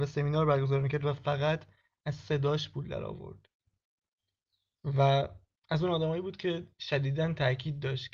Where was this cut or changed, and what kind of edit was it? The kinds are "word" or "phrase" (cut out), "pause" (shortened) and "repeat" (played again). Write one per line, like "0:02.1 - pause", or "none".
none